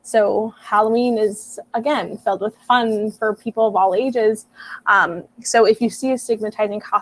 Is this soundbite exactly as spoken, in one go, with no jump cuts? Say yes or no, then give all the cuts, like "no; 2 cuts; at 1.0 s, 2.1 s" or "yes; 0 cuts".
yes; 0 cuts